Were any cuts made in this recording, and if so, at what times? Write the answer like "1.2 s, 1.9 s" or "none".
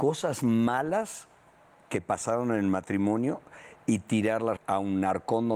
4.6 s